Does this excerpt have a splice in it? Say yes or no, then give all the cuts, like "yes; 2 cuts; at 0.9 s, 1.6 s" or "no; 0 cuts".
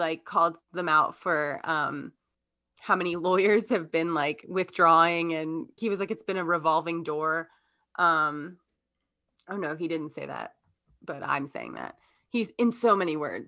yes; 1 cut; at 5.8 s